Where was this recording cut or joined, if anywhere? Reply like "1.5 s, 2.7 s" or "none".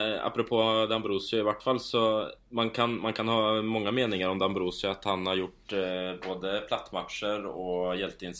2.4 s